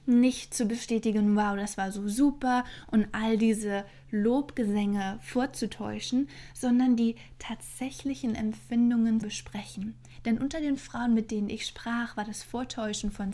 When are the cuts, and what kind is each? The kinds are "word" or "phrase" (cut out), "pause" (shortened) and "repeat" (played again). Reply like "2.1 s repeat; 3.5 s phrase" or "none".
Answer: 9.2 s word